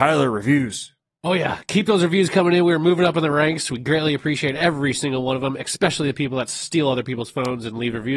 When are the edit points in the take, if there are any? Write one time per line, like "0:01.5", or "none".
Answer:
none